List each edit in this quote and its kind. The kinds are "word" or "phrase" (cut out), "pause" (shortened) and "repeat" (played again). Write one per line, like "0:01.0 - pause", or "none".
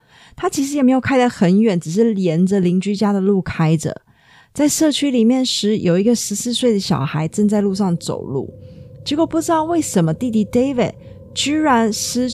none